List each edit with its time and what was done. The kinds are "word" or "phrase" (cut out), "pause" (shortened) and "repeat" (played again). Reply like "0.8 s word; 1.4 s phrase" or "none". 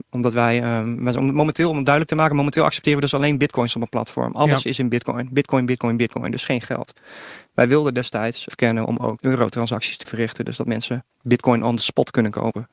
8.5 s phrase; 9.2 s word; 10.0 s word